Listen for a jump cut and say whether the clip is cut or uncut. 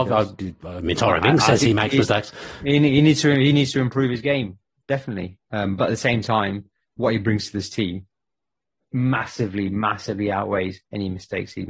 uncut